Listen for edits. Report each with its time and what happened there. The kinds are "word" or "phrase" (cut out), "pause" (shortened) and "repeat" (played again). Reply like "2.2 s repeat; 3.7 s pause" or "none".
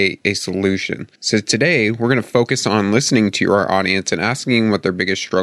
1.2 s pause